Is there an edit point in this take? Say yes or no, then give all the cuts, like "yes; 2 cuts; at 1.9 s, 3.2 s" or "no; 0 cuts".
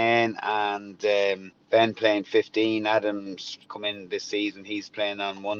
yes; 2 cuts; at 1.6 s, 3.7 s